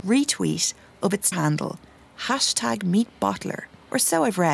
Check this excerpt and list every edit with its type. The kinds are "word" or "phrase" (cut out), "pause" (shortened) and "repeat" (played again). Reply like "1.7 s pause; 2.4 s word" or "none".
1.3 s word

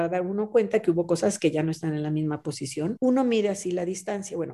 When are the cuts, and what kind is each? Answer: none

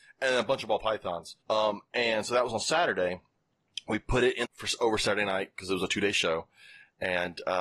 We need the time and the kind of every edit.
1.4 s pause; 4.4 s phrase

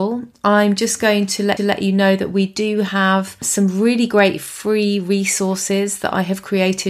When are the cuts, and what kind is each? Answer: 1.6 s repeat

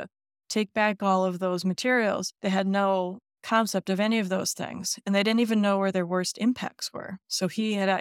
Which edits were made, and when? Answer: 2.4 s pause

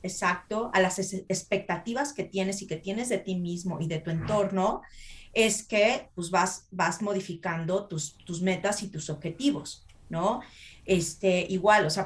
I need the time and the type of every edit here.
none

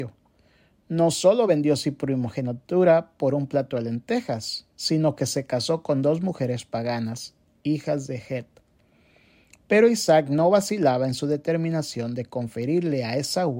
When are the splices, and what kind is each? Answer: none

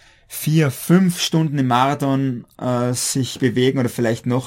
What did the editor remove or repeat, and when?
none

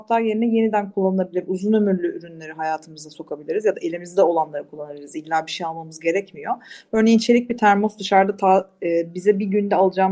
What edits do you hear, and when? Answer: none

